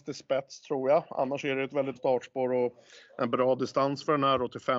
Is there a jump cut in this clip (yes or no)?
yes